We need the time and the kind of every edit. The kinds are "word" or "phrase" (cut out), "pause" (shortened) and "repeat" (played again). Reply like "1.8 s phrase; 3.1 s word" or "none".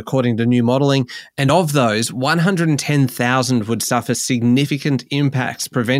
none